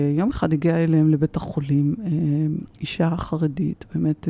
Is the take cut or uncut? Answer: cut